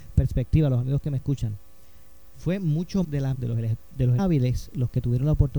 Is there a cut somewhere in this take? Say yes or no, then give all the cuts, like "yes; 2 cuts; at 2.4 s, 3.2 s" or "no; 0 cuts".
yes; 3 cuts; at 3.0 s, 3.3 s, 4.2 s